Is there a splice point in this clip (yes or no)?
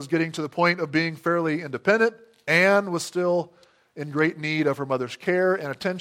no